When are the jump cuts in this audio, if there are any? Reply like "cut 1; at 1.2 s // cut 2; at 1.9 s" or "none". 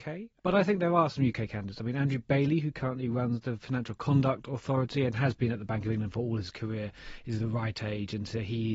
none